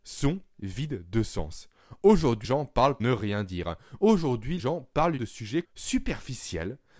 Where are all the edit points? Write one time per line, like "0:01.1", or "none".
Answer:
0:02.4
0:03.0
0:04.6
0:05.2
0:05.6